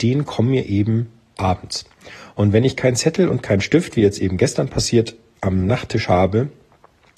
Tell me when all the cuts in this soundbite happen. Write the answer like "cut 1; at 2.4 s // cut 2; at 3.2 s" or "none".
none

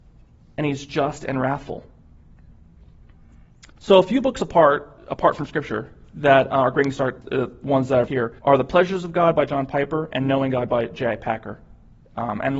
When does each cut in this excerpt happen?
cut 1; at 3.7 s // cut 2; at 5.0 s // cut 3; at 7.2 s // cut 4; at 8.1 s // cut 5; at 8.4 s

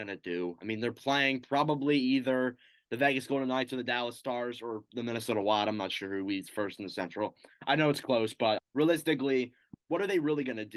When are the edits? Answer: cut 1; at 8.6 s

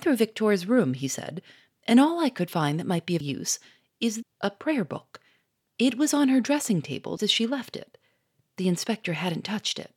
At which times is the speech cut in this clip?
cut 1; at 3.2 s // cut 2; at 4.2 s // cut 3; at 7.2 s

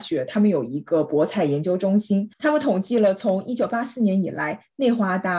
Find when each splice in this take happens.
none

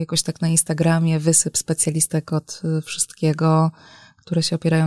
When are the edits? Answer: none

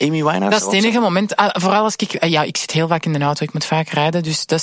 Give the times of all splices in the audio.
none

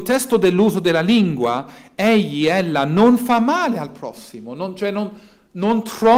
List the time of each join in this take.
none

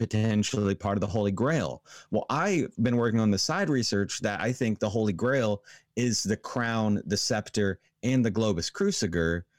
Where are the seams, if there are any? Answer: none

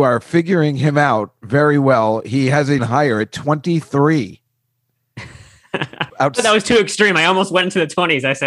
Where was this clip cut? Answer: cut 1; at 2.8 s // cut 2; at 6.1 s

